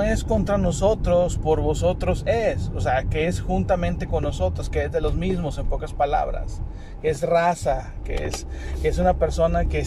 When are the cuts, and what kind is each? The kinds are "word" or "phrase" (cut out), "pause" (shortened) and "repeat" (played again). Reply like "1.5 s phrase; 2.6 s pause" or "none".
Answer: none